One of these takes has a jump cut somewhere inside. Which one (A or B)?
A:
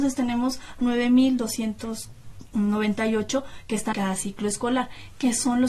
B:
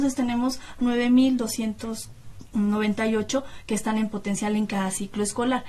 A